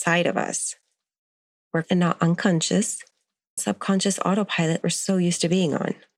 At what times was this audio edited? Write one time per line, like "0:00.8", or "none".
0:01.8
0:03.6
0:04.8

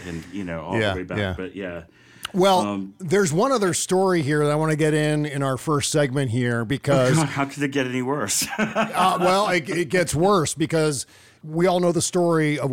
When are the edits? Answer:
none

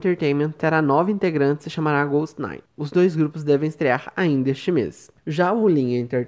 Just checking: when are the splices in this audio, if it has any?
0:02.7
0:05.2

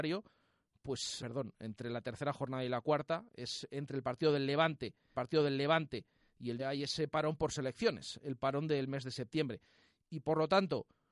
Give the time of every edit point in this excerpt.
0:01.2
0:05.1
0:06.6

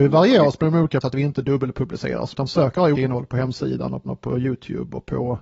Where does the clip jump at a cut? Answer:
0:01.0
0:02.3
0:02.9
0:04.1

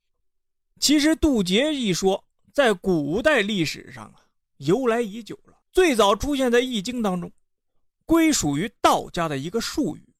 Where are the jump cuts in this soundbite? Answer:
0:05.6

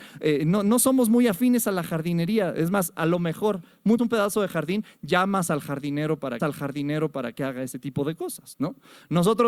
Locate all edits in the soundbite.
0:04.0
0:06.4

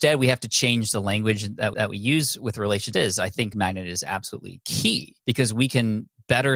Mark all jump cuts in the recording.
0:01.7
0:02.9
0:03.5
0:05.2

